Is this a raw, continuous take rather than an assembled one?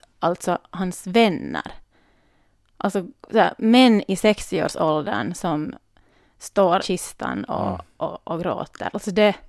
no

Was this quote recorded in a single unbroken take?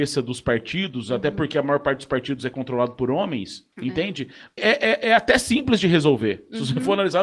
no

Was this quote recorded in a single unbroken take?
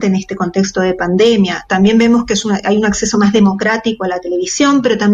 yes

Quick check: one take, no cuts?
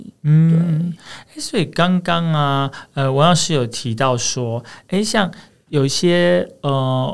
yes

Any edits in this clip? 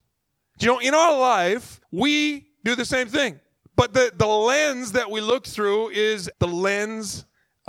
yes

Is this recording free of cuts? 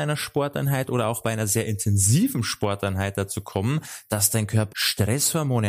no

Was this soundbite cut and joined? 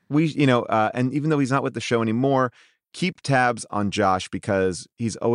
no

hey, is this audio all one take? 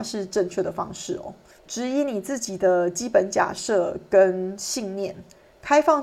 no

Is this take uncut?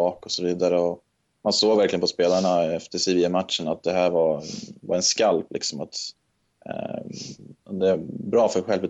yes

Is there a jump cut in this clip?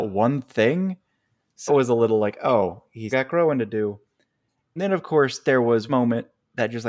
yes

